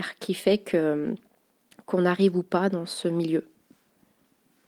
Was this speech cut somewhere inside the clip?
no; 0 cuts

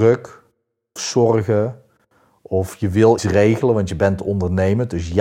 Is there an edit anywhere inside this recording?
yes; 2 cuts; at 1.0 s, 3.2 s

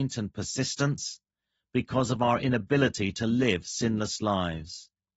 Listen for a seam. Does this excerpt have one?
no; 0 cuts

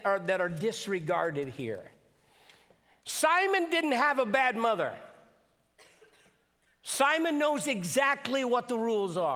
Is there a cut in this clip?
no; 0 cuts

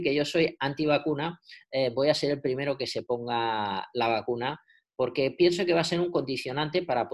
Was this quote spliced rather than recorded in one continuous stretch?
no; 0 cuts

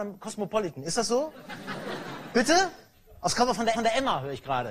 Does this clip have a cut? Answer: yes; 1 cut; at 3.7 s

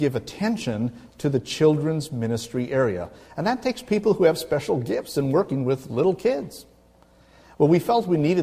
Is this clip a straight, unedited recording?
yes; 0 cuts

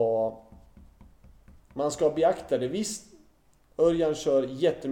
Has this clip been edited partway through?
no; 0 cuts

